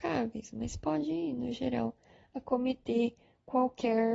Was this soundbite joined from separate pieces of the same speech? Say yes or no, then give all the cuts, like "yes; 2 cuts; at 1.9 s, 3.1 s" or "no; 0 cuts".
no; 0 cuts